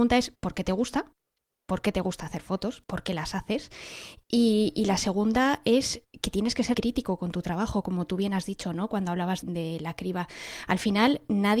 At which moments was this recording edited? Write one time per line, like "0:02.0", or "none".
0:06.7
0:09.4

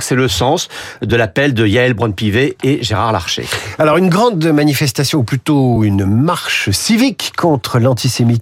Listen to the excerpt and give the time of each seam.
none

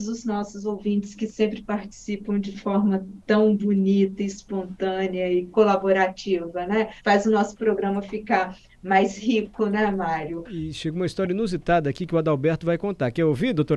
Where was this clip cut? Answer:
0:07.0

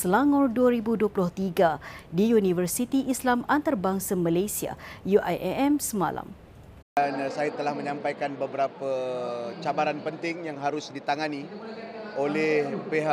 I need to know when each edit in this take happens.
0:06.8

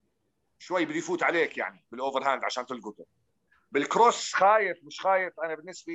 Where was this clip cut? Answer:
none

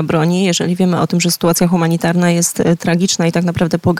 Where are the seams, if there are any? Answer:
none

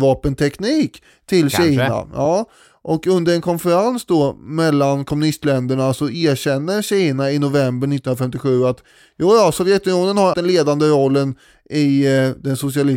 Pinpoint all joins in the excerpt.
0:10.3

